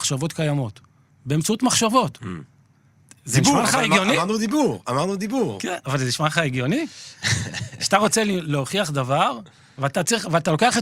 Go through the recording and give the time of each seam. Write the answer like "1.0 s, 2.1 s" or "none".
none